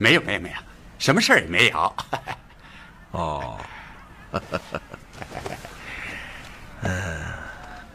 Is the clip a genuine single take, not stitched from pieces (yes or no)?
yes